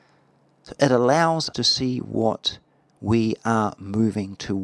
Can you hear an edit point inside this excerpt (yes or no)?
yes